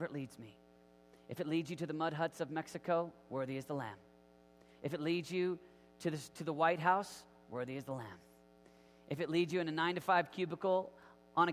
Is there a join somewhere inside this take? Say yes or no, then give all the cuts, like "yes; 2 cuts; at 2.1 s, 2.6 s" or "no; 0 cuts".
no; 0 cuts